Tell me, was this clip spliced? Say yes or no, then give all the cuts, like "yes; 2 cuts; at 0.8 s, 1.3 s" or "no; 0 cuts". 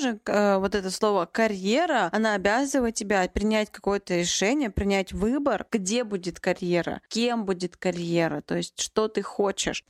no; 0 cuts